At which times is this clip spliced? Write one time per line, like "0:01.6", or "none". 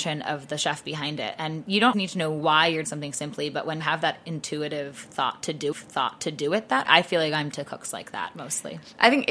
0:01.9
0:02.8
0:03.8
0:05.7
0:06.8
0:07.5